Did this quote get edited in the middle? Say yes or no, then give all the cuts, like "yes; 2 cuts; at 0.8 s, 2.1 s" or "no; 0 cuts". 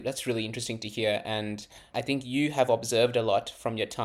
yes; 1 cut; at 1.9 s